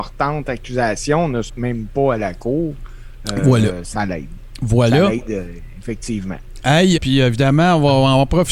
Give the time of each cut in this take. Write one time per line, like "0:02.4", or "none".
0:01.5
0:07.0